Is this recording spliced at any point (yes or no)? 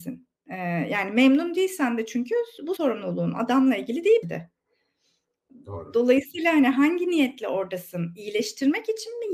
yes